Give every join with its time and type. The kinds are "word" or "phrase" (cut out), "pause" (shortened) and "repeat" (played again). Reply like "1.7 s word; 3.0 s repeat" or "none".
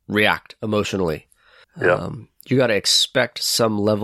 1.6 s pause